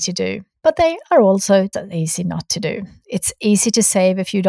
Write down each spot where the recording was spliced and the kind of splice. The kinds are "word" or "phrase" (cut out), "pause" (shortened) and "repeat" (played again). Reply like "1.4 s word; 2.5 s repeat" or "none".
1.7 s word